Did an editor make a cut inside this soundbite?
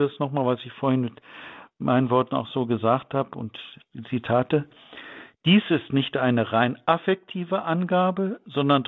no; 0 cuts

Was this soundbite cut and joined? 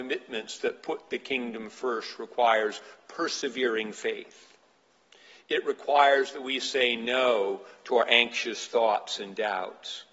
no; 0 cuts

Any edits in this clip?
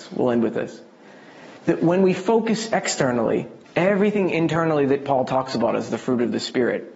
yes; 2 cuts; at 1.6 s, 3.6 s

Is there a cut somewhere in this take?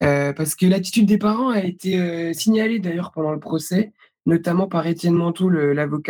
no; 0 cuts

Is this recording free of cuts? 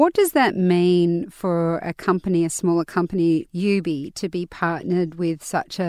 no; 1 cut; at 3.5 s

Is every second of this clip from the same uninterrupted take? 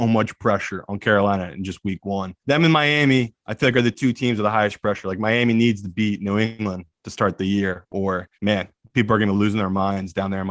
no; 2 cuts; at 2.4 s, 8.3 s

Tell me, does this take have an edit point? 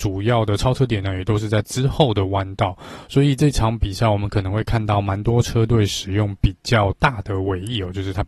yes; 1 cut; at 1.6 s

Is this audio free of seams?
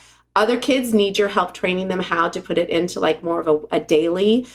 yes; 0 cuts

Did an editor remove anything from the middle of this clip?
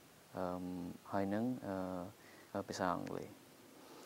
yes; 1 cut; at 2.5 s

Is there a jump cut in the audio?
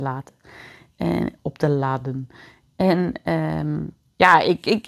no; 0 cuts

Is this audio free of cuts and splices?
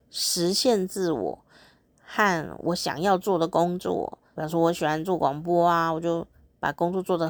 no; 1 cut; at 4.3 s

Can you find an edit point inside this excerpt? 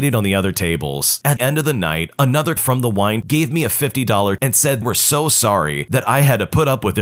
yes; 5 cuts; at 1.4 s, 2.6 s, 3.2 s, 4.4 s, 4.8 s

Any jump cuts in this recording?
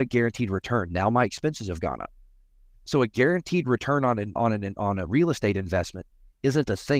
yes; 1 cut; at 4.4 s

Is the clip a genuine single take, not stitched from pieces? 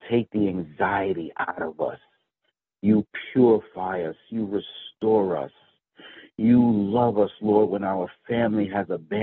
yes; 0 cuts

